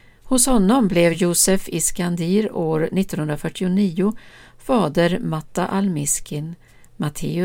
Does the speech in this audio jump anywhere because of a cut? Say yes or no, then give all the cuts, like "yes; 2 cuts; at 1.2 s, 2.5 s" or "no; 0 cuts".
no; 0 cuts